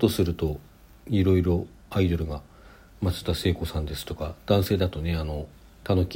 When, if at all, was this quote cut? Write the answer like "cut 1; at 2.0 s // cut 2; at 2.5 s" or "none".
none

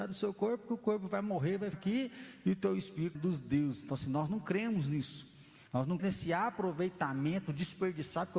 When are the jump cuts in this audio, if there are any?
cut 1; at 1.7 s // cut 2; at 3.1 s // cut 3; at 5.7 s // cut 4; at 6.0 s

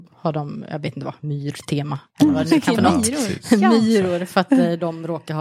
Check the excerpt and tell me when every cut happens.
cut 1; at 2.7 s

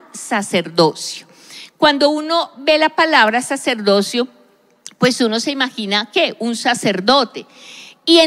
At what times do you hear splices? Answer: none

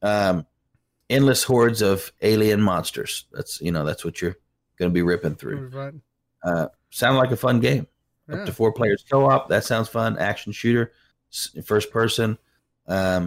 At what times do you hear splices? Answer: none

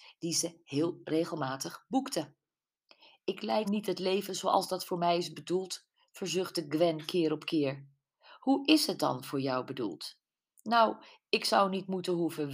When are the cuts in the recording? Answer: cut 1; at 3.6 s

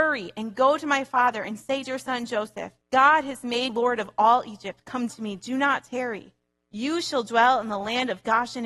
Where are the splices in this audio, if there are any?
cut 1; at 1.8 s // cut 2; at 2.8 s // cut 3; at 3.7 s // cut 4; at 5.1 s

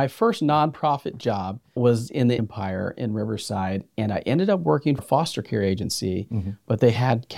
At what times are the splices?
cut 1; at 1.8 s // cut 2; at 2.4 s // cut 3; at 5.0 s

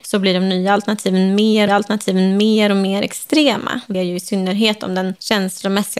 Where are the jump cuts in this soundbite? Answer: cut 1; at 1.7 s // cut 2; at 3.9 s

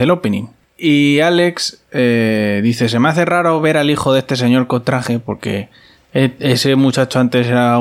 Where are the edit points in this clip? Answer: none

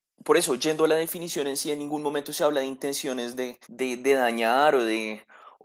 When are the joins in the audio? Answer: cut 1; at 3.6 s

